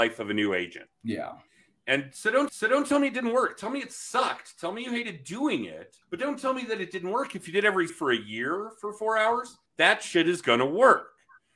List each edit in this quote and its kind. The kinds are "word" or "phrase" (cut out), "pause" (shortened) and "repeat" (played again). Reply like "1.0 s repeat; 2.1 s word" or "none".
0.9 s pause; 2.5 s repeat; 6.0 s pause; 7.9 s word; 9.7 s pause